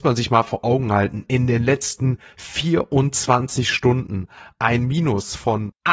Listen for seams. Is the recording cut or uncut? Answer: uncut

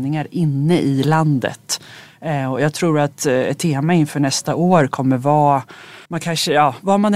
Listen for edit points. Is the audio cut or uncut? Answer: cut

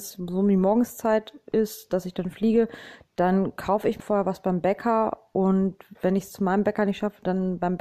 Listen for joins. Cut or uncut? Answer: cut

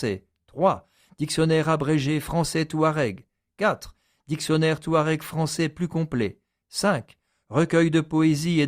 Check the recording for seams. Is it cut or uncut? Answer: uncut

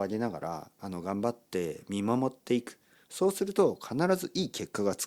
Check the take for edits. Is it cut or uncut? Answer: uncut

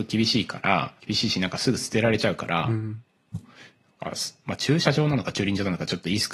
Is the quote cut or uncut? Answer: cut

